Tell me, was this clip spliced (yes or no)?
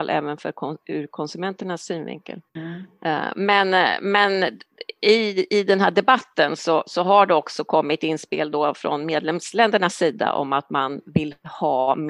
yes